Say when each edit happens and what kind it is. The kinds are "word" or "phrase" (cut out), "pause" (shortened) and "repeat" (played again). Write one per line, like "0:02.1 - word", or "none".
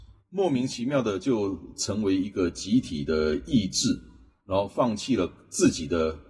none